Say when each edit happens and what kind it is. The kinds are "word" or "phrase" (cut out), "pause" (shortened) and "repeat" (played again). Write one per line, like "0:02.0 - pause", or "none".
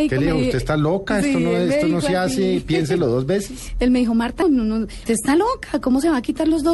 0:04.4 - word
0:05.1 - word